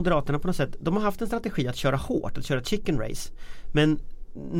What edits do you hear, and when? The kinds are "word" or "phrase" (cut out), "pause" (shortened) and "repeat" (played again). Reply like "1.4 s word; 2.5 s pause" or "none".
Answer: none